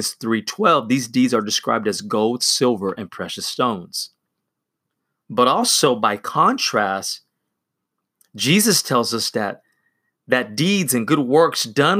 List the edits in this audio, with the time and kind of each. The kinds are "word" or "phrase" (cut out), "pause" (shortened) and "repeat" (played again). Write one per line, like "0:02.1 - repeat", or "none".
none